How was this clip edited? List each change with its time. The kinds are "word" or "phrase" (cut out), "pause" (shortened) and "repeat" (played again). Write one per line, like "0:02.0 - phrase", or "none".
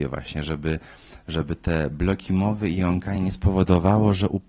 none